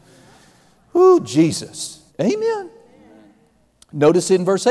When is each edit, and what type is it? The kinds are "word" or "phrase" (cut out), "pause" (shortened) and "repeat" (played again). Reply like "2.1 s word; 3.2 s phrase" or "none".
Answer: 2.1 s pause